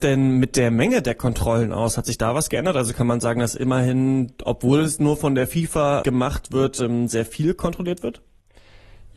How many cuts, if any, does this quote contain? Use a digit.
1